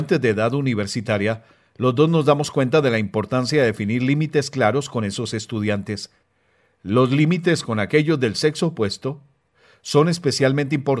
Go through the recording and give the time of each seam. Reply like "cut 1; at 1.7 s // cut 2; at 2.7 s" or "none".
none